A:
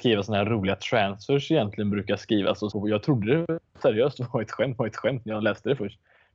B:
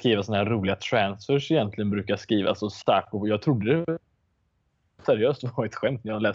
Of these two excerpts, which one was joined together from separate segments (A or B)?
A